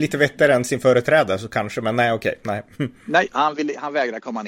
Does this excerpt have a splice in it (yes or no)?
no